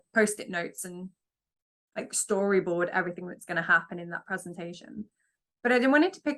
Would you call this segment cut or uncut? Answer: uncut